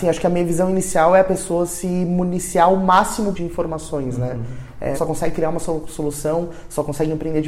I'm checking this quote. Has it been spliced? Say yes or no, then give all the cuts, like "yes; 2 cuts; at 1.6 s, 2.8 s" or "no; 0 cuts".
yes; 2 cuts; at 3.3 s, 4.9 s